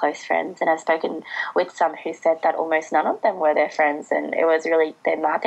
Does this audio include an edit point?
no; 0 cuts

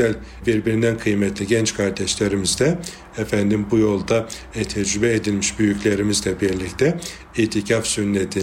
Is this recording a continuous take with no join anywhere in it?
yes; 0 cuts

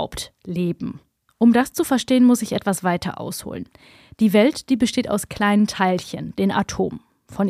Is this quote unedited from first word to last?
yes; 0 cuts

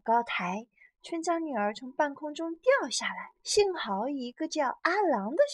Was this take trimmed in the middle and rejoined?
yes; 1 cut; at 3.4 s

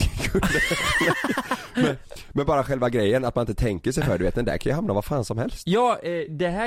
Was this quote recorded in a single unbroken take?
yes; 0 cuts

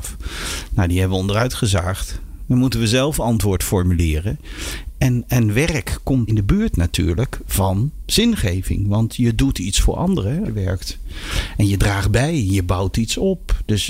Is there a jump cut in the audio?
yes; 2 cuts; at 6.3 s, 10.4 s

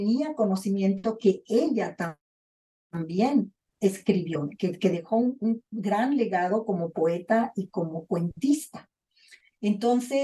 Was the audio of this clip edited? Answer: no; 0 cuts

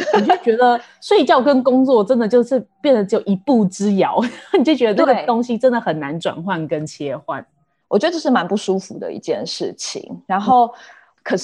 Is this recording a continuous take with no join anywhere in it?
yes; 0 cuts

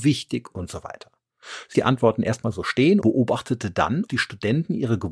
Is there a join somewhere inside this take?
yes; 3 cuts; at 1.7 s, 3.0 s, 4.1 s

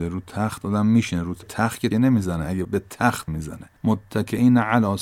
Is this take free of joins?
no; 5 cuts; at 1.4 s, 1.9 s, 2.6 s, 3.3 s, 3.8 s

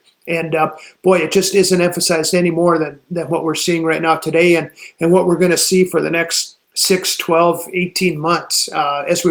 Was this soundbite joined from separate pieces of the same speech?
yes; 1 cut; at 6.6 s

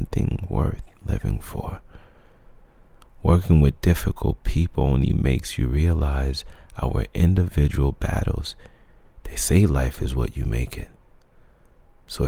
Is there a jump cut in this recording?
no; 0 cuts

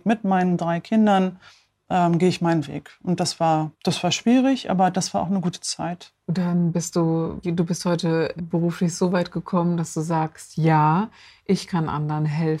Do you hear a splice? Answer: yes; 5 cuts; at 1.5 s, 3.7 s, 6.2 s, 7.4 s, 8.4 s

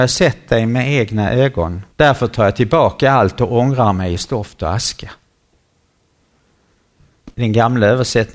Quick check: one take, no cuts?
no; 2 cuts; at 1.9 s, 7.3 s

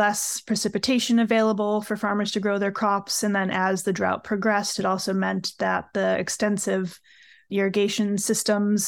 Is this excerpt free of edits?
yes; 0 cuts

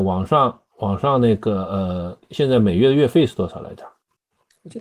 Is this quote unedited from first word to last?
no; 1 cut; at 2.2 s

